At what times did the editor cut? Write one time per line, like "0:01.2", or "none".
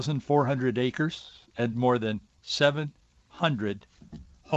0:01.7